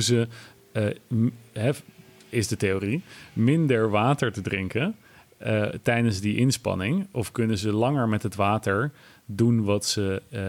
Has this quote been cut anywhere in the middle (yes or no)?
no